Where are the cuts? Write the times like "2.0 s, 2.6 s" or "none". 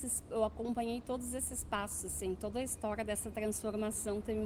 none